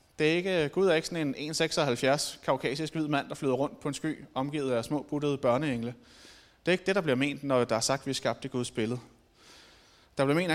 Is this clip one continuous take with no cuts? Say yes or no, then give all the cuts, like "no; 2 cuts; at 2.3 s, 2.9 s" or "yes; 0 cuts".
yes; 0 cuts